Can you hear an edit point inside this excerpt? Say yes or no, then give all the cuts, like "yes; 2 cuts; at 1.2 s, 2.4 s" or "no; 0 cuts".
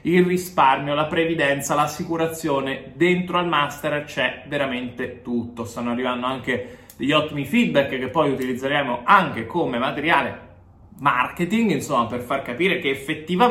yes; 1 cut; at 10.8 s